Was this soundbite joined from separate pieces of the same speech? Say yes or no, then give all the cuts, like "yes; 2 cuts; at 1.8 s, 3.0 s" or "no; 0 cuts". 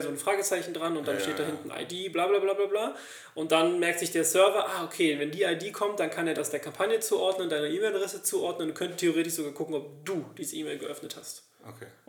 no; 0 cuts